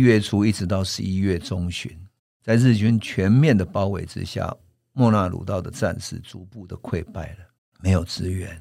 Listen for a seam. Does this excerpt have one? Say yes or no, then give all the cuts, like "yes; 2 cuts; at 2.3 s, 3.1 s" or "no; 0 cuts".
no; 0 cuts